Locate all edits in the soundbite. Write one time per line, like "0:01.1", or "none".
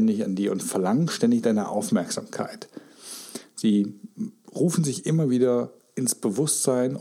none